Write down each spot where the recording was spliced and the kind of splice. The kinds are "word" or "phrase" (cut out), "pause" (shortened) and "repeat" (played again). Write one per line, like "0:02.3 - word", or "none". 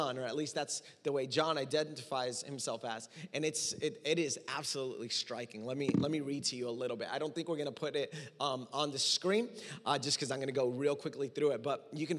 none